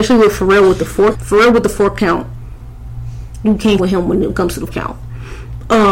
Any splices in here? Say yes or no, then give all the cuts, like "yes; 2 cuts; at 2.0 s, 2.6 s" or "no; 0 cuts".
yes; 4 cuts; at 1.1 s, 3.8 s, 4.3 s, 4.7 s